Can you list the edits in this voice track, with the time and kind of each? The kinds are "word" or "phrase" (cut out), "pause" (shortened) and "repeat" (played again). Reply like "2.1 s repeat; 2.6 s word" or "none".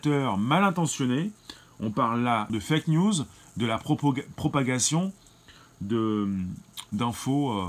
2.5 s word